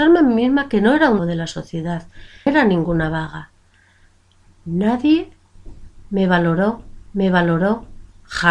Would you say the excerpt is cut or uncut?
cut